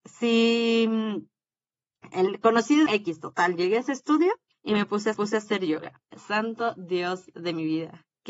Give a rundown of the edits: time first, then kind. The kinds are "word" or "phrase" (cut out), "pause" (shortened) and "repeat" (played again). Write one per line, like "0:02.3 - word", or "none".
0:02.1 - word
0:02.9 - phrase
0:04.5 - pause
0:05.1 - repeat
0:06.0 - pause